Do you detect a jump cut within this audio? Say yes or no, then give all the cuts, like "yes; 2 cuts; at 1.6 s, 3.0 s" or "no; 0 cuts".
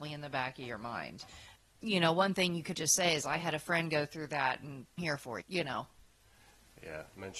yes; 3 cuts; at 2.7 s, 5.0 s, 5.4 s